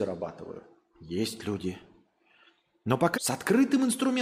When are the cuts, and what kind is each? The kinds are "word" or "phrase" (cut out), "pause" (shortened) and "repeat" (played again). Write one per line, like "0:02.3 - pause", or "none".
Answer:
0:03.1 - word